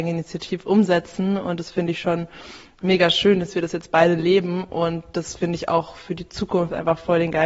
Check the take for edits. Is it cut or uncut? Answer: uncut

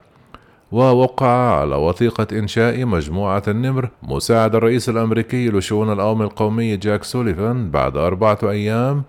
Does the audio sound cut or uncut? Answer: cut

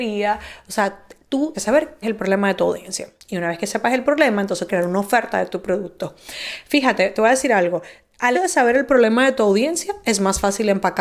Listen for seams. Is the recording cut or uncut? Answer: cut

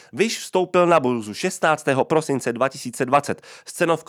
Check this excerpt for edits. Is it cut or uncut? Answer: uncut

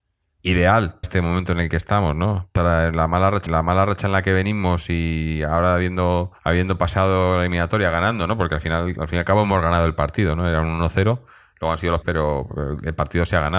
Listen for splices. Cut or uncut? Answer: cut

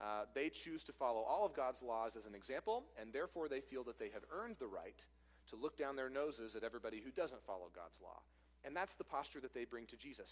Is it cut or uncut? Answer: uncut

